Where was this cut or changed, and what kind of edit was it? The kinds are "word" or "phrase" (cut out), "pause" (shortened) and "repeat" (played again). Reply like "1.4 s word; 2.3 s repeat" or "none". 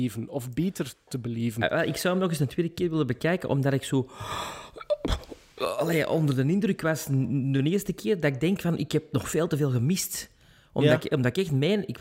none

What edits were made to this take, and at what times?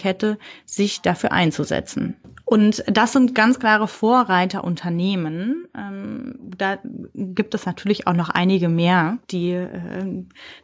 9.2 s pause

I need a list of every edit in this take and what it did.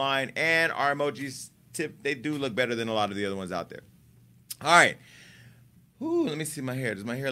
none

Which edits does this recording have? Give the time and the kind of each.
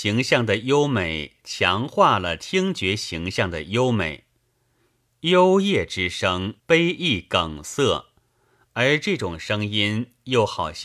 6.6 s pause

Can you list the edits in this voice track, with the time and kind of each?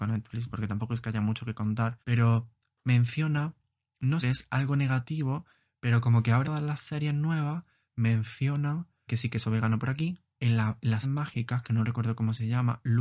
2.0 s pause; 4.2 s word; 6.4 s word; 9.1 s word; 11.0 s phrase

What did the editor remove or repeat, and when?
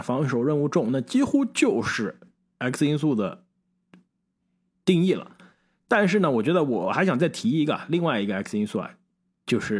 none

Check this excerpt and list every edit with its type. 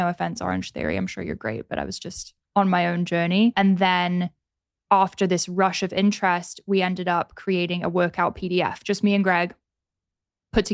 2.4 s pause

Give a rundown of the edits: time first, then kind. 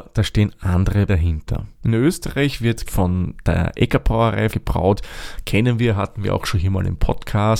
1.1 s word; 1.8 s pause; 2.9 s word; 4.5 s phrase

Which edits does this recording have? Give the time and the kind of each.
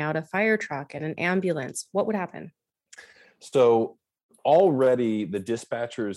none

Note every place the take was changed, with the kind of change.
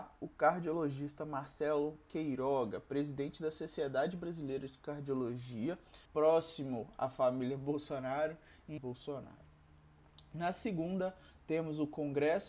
6.1 s pause; 8.8 s phrase

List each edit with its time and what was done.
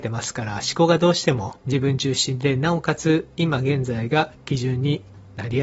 1.6 s pause

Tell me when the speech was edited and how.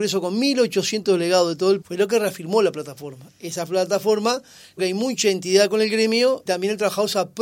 1.8 s word; 4.8 s word; 6.5 s word

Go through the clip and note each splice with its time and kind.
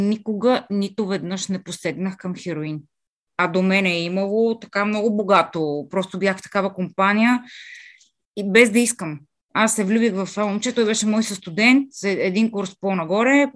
none

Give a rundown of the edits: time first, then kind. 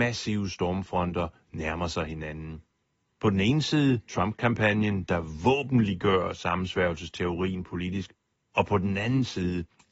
4.1 s pause

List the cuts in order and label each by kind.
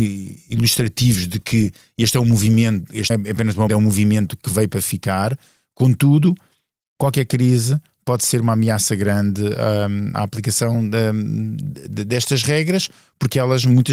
3.1 s word; 3.7 s word; 10.1 s word

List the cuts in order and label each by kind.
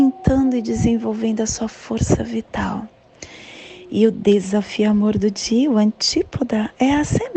none

